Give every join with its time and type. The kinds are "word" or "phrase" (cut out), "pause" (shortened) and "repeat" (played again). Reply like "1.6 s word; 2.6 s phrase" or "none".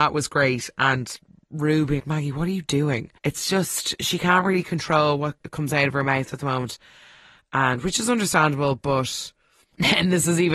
2.0 s word; 3.2 s pause